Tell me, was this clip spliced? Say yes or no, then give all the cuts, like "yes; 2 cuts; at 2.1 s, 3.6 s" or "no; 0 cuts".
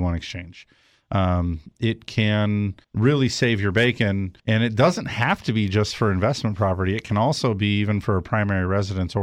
yes; 2 cuts; at 2.8 s, 4.4 s